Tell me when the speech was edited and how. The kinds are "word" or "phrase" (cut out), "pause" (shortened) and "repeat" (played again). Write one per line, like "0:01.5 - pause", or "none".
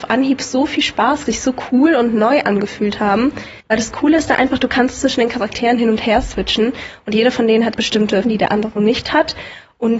0:01.3 - phrase
0:03.6 - pause
0:07.7 - word
0:08.2 - word